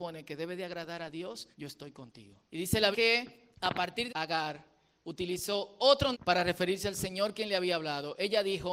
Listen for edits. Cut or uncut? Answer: cut